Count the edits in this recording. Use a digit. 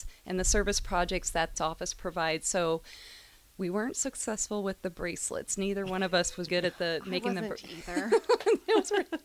2